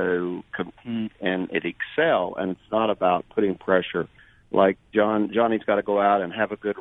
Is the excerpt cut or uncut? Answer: uncut